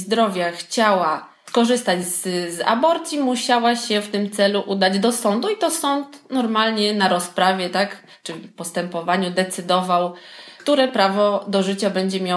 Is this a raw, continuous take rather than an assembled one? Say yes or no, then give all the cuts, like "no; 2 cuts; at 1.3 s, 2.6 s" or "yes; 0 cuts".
yes; 0 cuts